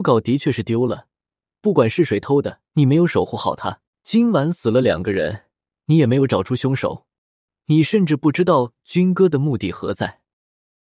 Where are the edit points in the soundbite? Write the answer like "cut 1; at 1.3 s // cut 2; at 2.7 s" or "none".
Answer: cut 1; at 2.7 s // cut 2; at 3.9 s